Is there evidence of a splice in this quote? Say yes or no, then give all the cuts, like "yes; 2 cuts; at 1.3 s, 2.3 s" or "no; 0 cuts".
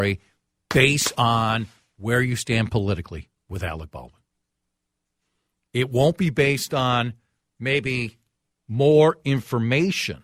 no; 0 cuts